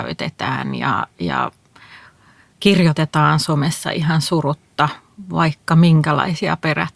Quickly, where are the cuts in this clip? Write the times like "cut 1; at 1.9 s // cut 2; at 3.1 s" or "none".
none